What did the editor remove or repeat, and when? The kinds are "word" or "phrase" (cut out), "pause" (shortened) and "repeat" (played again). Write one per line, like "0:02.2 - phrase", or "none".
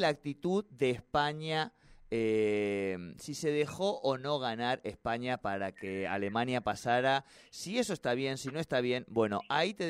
none

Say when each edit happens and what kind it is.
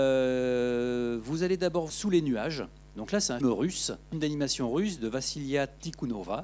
0:01.9 - word
0:03.4 - word
0:04.1 - word

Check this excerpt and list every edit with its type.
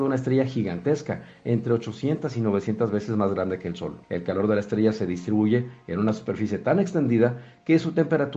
0:04.0 - pause

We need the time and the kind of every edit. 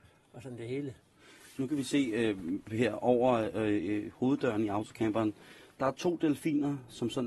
none

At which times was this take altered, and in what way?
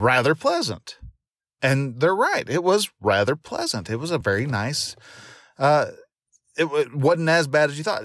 none

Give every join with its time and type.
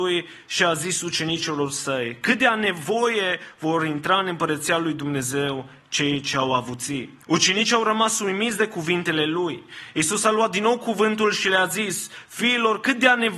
0:07.2 - pause

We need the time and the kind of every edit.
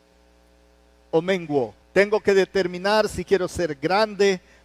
0:01.8 - pause

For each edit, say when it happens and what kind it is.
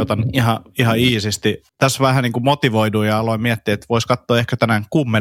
0:01.7 - pause

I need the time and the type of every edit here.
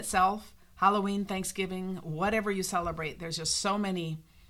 none

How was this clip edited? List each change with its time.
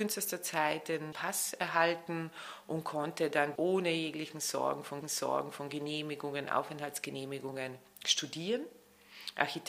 0:01.1 - word
0:03.6 - word
0:05.0 - repeat

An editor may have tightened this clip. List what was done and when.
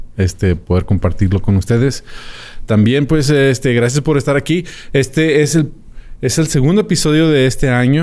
none

